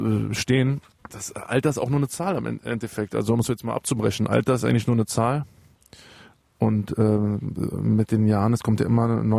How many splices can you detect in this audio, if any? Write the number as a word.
zero